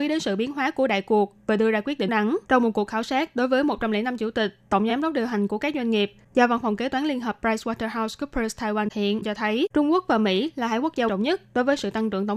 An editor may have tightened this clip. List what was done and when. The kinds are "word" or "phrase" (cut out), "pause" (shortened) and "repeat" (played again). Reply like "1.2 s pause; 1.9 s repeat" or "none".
2.1 s word; 2.4 s pause; 4.9 s phrase; 8.9 s word; 9.7 s pause; 11.1 s word